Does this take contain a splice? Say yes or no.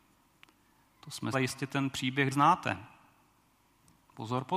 yes